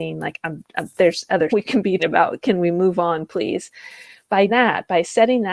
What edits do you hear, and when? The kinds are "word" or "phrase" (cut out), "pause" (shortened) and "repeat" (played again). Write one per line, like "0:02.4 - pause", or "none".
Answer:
0:01.5 - word
0:02.0 - word
0:04.5 - word